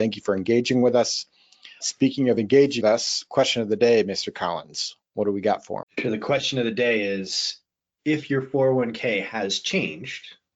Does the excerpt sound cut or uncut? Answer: cut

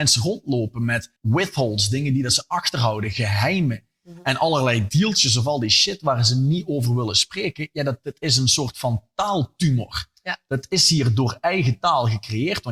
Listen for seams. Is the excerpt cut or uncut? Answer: cut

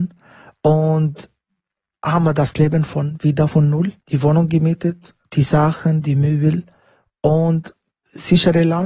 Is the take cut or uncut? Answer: cut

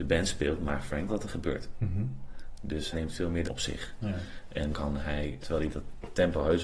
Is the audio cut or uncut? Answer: cut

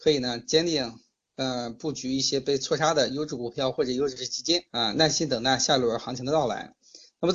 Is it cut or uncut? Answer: cut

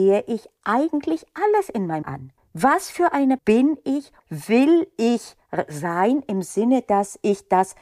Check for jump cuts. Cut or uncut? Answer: cut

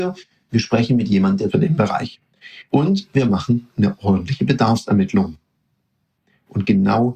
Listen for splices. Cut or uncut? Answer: cut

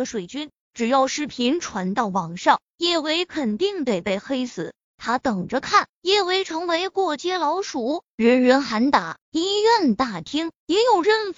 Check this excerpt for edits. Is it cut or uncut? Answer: cut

